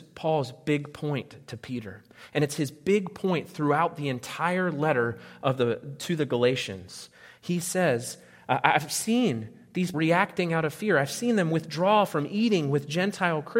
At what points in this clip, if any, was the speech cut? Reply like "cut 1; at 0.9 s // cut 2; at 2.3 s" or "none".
cut 1; at 9.9 s